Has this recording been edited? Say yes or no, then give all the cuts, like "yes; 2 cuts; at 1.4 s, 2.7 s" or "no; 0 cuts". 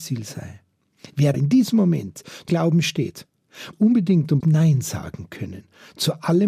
yes; 4 cuts; at 1.3 s, 2.5 s, 3.7 s, 4.4 s